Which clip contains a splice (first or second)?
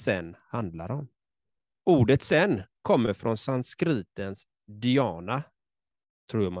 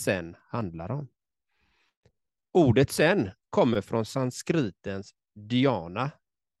first